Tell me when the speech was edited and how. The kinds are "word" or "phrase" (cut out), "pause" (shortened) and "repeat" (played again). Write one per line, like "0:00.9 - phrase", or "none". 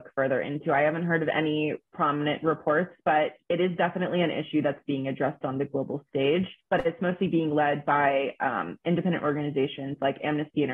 0:03.4 - pause
0:06.6 - pause

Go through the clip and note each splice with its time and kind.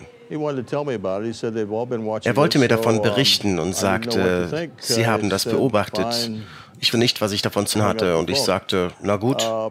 0:06.9 - word
0:07.7 - word

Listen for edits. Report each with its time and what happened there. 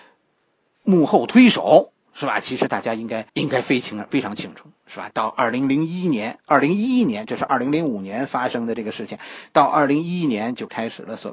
0:02.0 - pause
0:03.3 - pause

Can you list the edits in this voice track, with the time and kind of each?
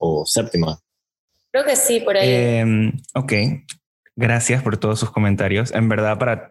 none

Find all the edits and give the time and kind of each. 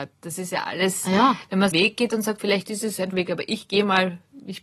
0:01.7 - word
0:02.4 - word
0:03.1 - word

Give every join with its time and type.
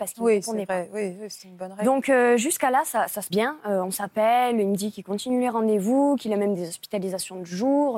0:03.3 - word

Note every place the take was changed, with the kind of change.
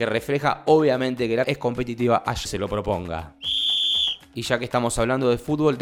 0:01.4 - word
0:02.4 - word

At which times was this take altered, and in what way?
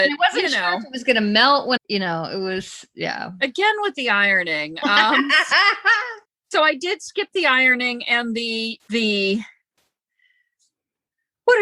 0:01.8 - phrase
0:06.2 - pause
0:08.8 - word

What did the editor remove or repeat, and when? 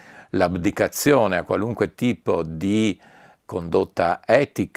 none

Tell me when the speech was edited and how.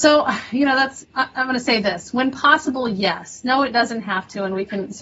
0:01.0 - word

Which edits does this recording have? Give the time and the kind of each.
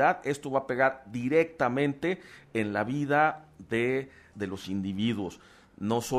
0:04.3 - phrase

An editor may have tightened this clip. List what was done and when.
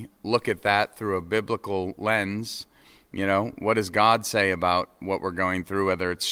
none

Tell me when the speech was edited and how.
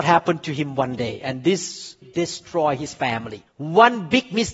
0:02.0 - word

